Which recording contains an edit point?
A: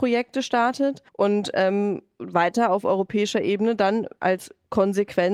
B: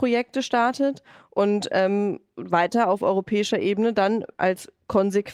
A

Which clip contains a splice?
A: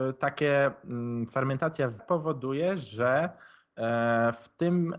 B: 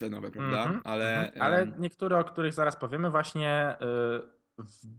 A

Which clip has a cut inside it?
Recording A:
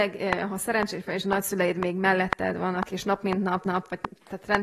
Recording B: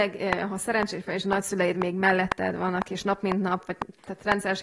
A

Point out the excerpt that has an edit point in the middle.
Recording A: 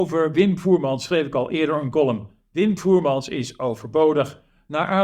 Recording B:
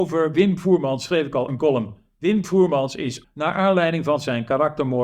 B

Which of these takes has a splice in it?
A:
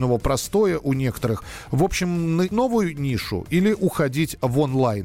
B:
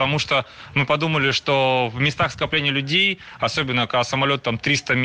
A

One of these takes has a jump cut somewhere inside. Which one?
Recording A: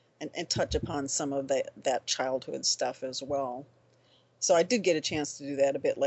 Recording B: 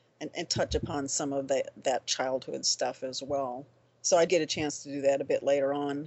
B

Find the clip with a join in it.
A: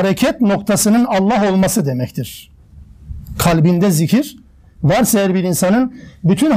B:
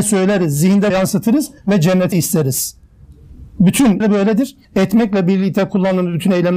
B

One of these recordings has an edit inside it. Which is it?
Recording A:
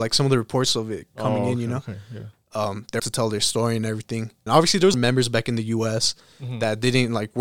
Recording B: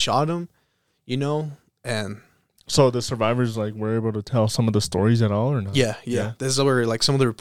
A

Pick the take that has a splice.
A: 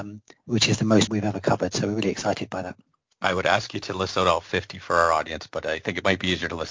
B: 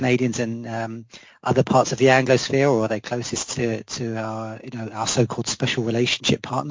A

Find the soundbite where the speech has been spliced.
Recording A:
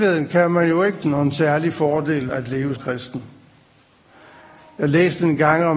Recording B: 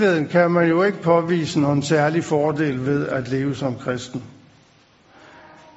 A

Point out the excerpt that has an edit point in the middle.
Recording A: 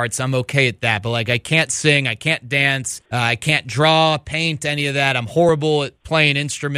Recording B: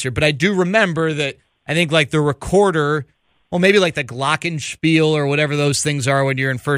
A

